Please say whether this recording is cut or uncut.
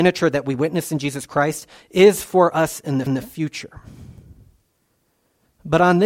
cut